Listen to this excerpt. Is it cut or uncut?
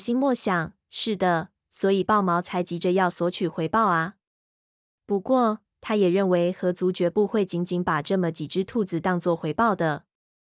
uncut